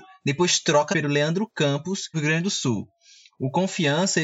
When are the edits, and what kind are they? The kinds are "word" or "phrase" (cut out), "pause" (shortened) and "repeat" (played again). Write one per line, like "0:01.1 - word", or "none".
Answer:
0:00.9 - word
0:02.1 - word